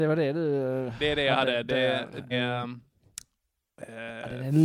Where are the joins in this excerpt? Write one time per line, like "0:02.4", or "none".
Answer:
0:02.3